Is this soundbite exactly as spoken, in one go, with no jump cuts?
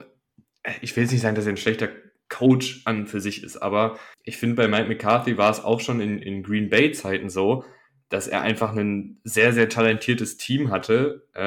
no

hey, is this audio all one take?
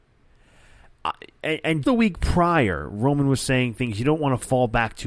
no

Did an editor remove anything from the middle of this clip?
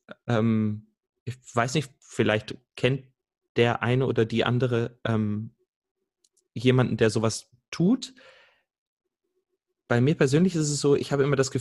no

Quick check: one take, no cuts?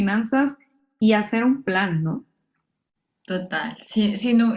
yes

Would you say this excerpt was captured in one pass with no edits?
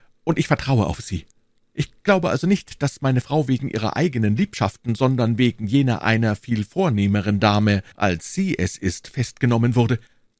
no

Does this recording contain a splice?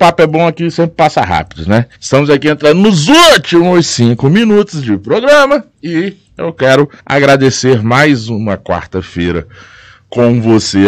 yes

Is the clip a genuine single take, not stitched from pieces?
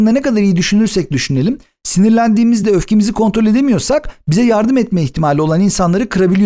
yes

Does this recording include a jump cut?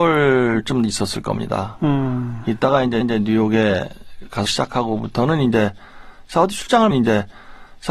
yes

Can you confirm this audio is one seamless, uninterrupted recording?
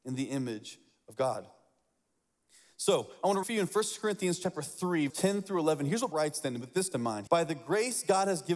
no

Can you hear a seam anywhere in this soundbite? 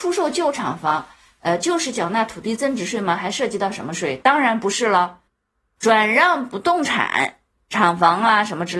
no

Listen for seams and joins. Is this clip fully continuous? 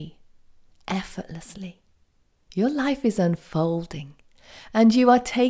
no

